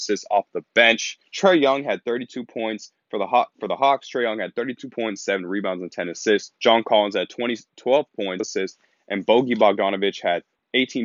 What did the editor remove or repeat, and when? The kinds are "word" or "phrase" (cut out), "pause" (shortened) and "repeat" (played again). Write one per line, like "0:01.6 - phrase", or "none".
0:01.3 - pause
0:06.6 - pause
0:08.4 - phrase